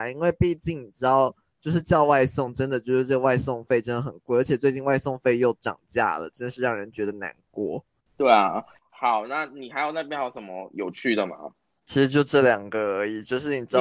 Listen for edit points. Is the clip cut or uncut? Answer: uncut